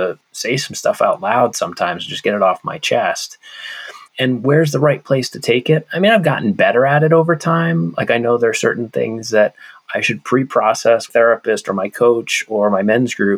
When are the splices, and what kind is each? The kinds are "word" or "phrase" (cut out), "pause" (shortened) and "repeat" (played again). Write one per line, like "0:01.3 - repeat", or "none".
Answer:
0:04.1 - pause
0:11.1 - phrase